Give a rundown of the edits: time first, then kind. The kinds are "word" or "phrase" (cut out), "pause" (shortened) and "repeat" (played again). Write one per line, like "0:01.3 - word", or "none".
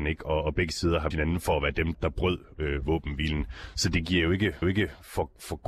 0:01.1 - word
0:01.9 - word
0:04.6 - repeat